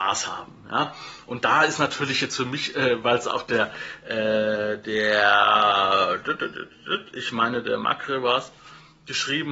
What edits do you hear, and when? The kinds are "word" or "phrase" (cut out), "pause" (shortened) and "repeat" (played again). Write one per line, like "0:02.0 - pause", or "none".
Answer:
none